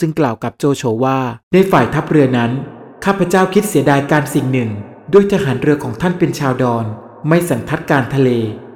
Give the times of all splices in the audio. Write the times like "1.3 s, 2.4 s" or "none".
1.4 s